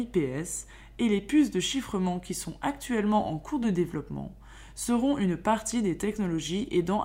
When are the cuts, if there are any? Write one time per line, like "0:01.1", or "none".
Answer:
none